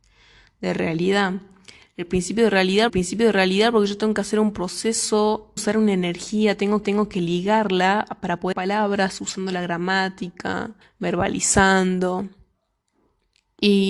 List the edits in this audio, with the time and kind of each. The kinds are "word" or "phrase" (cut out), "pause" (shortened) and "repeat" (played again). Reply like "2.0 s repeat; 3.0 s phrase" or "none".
2.9 s repeat; 5.6 s phrase; 6.8 s repeat; 8.5 s word; 10.8 s pause